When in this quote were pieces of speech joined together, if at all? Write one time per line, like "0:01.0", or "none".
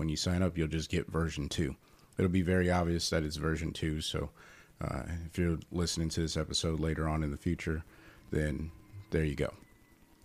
none